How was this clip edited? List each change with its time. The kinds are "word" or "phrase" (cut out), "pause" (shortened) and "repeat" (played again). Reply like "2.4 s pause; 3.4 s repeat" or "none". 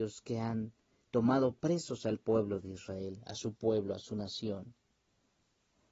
none